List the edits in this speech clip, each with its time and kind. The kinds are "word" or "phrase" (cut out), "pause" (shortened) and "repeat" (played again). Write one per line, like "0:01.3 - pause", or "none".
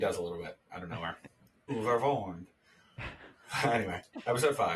0:01.7 - word